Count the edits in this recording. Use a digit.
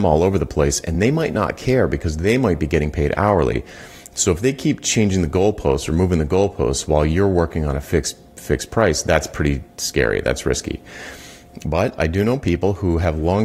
0